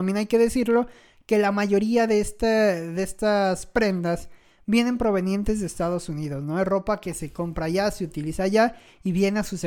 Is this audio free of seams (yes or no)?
yes